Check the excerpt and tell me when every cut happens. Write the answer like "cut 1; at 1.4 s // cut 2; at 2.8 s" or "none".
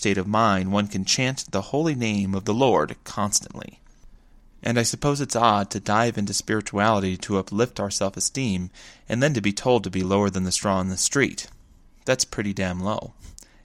none